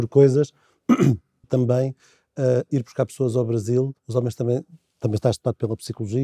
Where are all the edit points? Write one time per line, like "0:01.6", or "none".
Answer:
0:01.4
0:04.0